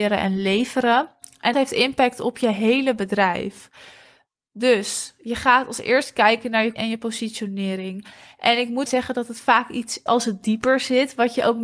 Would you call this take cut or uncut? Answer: cut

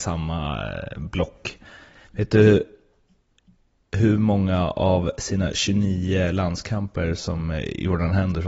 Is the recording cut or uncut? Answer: uncut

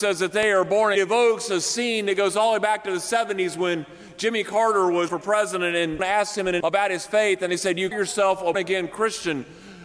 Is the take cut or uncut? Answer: cut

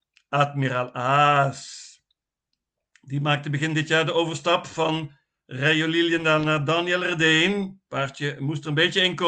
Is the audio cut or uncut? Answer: uncut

